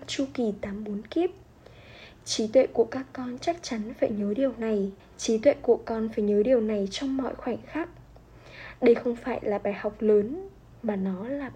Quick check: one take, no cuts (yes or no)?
no